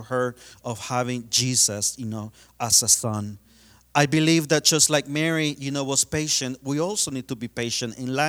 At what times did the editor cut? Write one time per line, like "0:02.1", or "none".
none

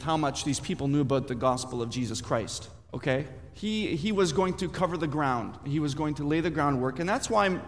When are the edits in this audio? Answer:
0:02.9

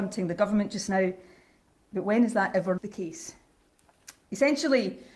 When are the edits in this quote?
0:02.8

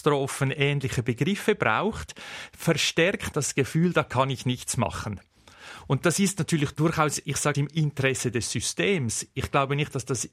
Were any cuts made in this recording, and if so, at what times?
0:03.3
0:07.5

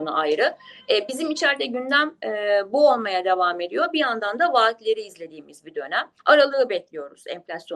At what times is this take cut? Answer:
0:06.2

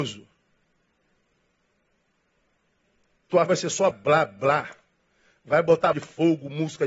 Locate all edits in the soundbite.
0:03.5
0:03.9
0:05.9

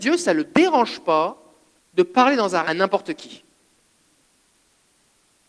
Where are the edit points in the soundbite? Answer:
0:01.8
0:02.6

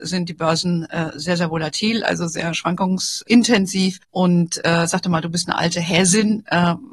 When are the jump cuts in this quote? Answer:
0:04.0

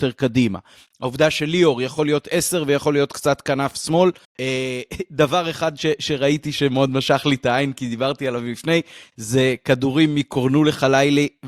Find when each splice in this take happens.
none

